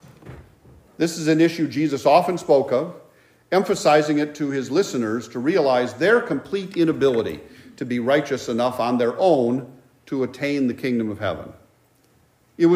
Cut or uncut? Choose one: uncut